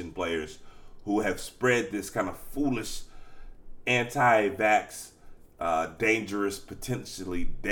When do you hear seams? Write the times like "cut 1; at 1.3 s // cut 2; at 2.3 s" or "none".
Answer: none